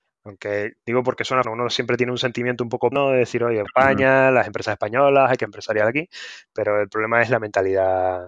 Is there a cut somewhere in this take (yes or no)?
yes